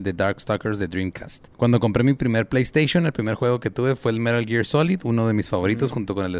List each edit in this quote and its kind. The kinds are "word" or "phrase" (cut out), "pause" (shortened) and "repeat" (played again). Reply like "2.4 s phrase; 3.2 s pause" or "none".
1.5 s pause